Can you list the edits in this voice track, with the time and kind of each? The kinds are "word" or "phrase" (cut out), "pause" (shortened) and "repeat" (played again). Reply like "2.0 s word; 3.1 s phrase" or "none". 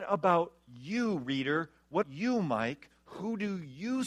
2.0 s word